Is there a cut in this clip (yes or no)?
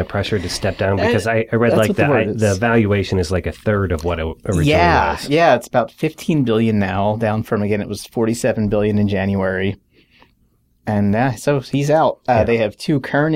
no